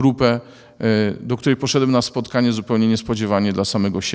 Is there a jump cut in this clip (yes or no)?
no